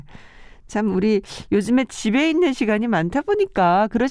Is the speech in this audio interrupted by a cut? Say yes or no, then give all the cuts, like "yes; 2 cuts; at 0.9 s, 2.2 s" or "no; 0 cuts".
no; 0 cuts